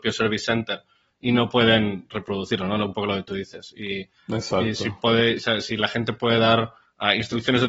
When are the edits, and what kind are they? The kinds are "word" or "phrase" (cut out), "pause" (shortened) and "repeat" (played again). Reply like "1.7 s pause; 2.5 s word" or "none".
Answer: none